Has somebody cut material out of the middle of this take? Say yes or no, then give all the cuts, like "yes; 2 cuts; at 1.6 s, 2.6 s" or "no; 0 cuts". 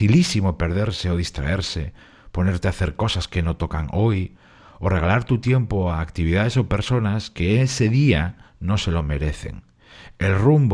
no; 0 cuts